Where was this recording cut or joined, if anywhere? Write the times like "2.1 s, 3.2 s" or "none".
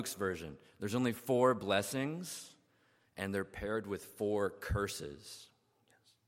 none